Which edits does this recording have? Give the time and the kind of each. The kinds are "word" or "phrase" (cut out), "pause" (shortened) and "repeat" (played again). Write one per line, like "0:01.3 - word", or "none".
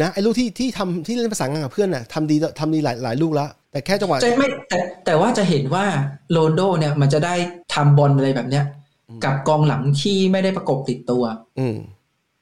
0:03.6 - pause
0:07.6 - pause